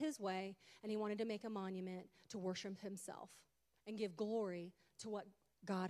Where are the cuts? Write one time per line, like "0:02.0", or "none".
none

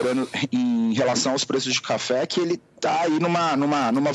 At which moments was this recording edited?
none

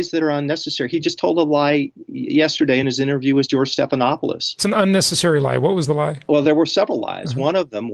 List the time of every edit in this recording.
none

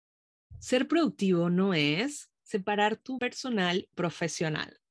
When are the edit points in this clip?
0:02.4
0:03.2
0:03.9

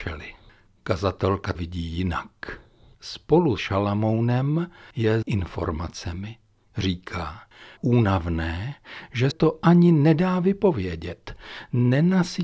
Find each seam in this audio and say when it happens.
0:01.5
0:03.6
0:05.2
0:07.8
0:09.3

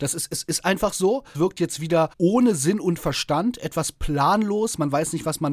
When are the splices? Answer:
0:01.3
0:02.1

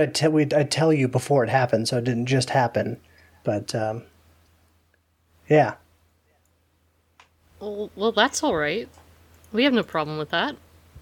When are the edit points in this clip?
none

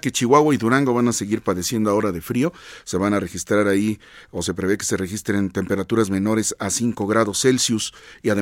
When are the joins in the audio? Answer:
none

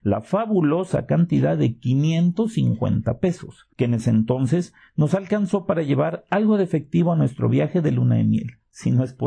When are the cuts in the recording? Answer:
0:03.7

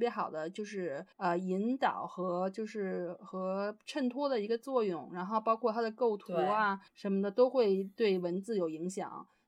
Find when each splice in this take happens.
0:01.1
0:06.9

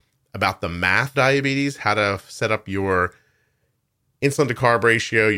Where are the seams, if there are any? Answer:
0:01.1

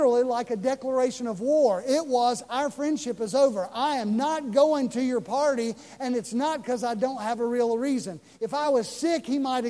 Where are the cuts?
none

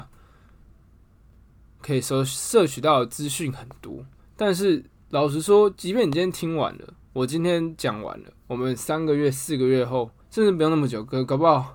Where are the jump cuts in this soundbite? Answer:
0:04.2
0:07.0
0:08.4
0:10.2

